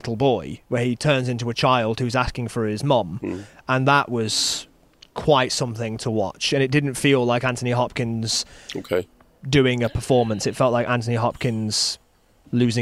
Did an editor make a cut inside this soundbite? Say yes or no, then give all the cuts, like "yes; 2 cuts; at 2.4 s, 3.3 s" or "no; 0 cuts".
no; 0 cuts